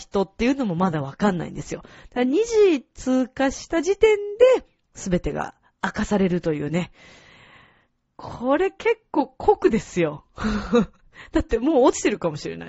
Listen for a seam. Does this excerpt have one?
no; 0 cuts

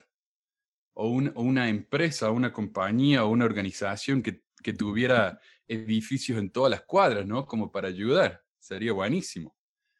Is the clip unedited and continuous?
yes; 0 cuts

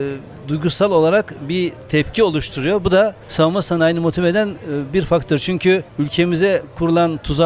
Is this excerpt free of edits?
no; 2 cuts; at 3.2 s, 5.9 s

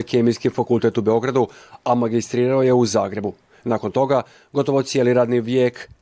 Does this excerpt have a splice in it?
no; 0 cuts

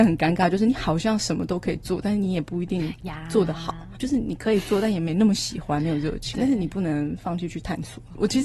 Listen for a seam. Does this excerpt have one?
yes; 1 cut; at 4.0 s

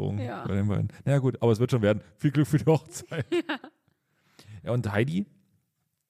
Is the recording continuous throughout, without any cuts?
yes; 0 cuts

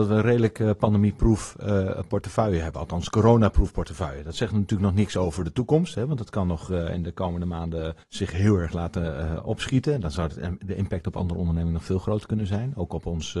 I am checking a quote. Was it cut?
yes; 1 cut; at 8.0 s

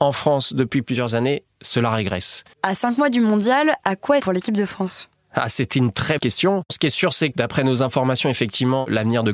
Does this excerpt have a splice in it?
yes; 4 cuts; at 2.5 s, 4.2 s, 6.2 s, 7.3 s

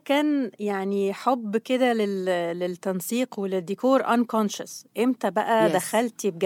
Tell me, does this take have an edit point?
no; 0 cuts

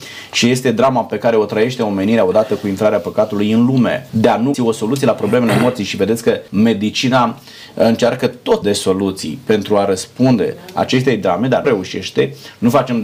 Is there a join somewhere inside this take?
yes; 5 cuts; at 4.1 s, 4.5 s, 6.5 s, 8.6 s, 11.6 s

